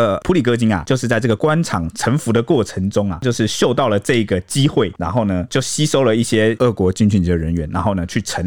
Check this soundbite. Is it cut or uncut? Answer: cut